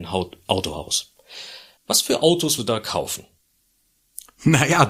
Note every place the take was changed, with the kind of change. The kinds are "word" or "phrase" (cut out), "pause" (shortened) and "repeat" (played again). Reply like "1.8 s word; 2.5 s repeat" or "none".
1.8 s pause; 2.6 s word

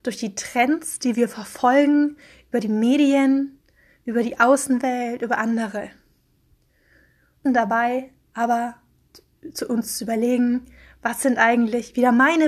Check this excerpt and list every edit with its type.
7.4 s word

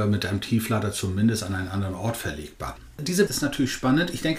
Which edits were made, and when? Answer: 3.3 s word

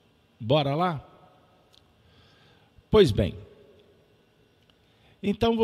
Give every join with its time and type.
none

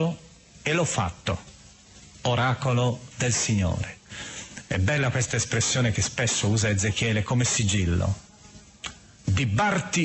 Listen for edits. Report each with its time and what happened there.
none

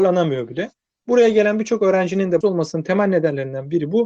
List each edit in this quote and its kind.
2.4 s word

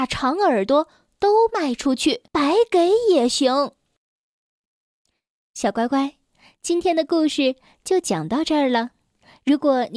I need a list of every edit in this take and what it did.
2.3 s pause

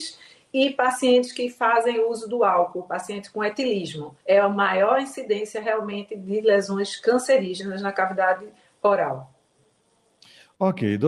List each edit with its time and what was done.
4.2 s pause

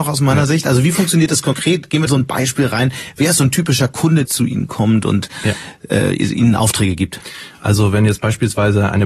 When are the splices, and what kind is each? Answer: 2.1 s phrase; 4.2 s word

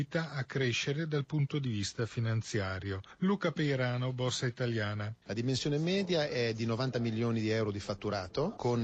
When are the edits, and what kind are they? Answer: none

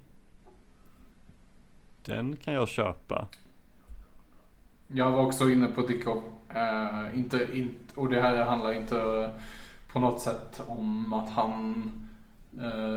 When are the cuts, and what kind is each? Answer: none

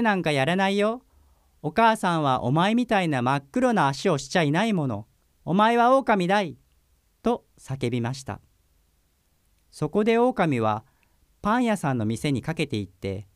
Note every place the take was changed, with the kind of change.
none

